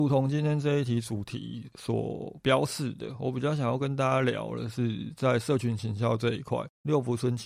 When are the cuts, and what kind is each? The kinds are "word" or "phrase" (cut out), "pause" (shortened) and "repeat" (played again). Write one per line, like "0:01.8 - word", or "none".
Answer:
none